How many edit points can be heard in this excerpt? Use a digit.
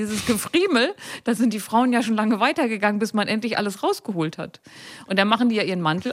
0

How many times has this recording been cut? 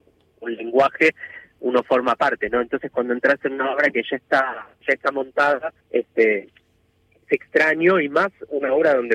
2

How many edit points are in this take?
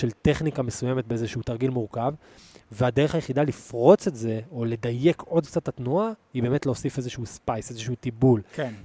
0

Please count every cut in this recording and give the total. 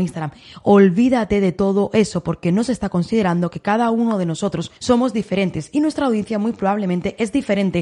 1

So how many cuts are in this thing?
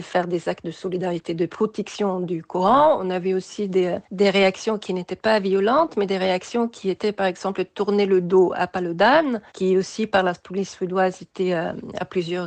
2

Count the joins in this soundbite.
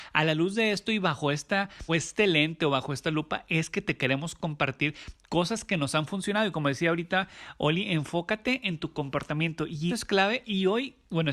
2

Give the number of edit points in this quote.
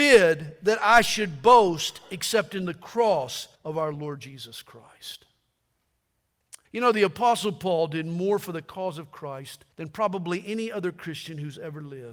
3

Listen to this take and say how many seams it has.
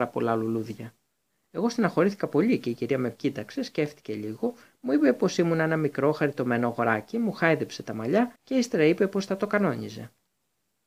1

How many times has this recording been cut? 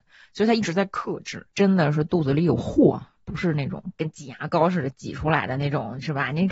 0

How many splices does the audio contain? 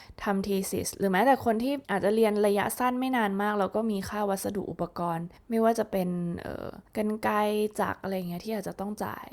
3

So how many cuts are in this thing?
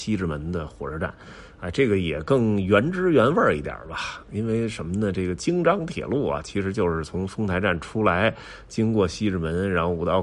0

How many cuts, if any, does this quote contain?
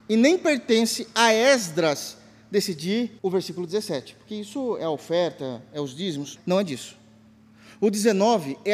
2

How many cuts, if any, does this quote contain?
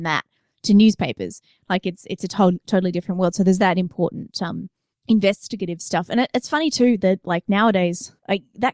0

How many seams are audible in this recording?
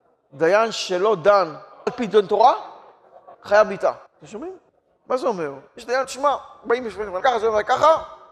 6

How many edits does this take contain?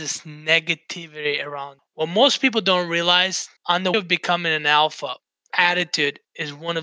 4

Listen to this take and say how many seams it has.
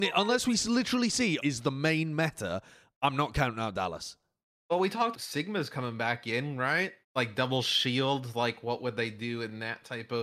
3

